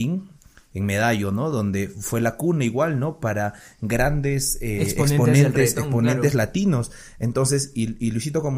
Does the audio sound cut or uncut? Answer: uncut